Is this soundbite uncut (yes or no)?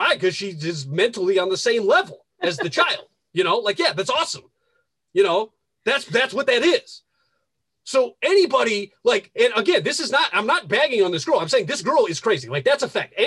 yes